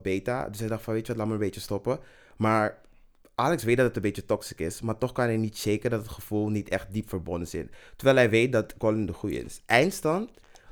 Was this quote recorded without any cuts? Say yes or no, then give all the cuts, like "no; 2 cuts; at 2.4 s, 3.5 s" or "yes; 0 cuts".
yes; 0 cuts